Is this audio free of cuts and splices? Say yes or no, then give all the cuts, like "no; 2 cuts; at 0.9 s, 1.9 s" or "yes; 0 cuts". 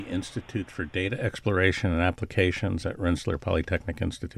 yes; 0 cuts